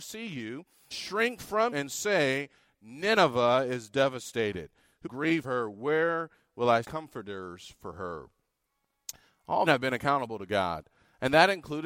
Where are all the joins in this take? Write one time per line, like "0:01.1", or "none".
0:00.9
0:01.7
0:05.1
0:05.4
0:06.8
0:09.7